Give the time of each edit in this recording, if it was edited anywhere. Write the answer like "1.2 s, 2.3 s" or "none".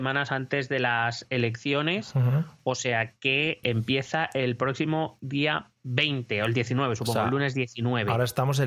3.6 s